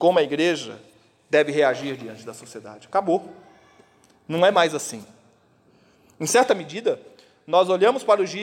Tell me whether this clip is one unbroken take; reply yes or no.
yes